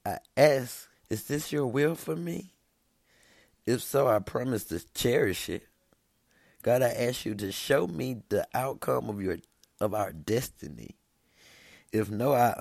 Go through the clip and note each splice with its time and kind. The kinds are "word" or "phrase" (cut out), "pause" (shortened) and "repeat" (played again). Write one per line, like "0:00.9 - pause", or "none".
0:00.9 - pause